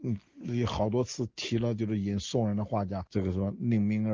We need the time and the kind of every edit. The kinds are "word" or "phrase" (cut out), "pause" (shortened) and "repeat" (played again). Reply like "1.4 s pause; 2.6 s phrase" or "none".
3.1 s pause